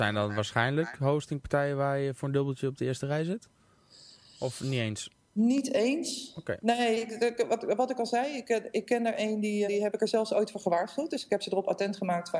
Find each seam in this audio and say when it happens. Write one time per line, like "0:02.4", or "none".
0:09.6